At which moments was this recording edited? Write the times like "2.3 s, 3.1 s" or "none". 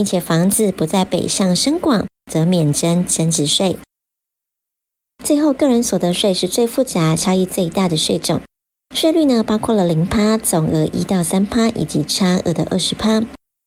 none

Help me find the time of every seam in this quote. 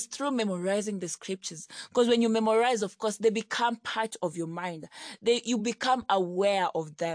none

